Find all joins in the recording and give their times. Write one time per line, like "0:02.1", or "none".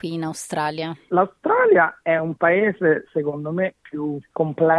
none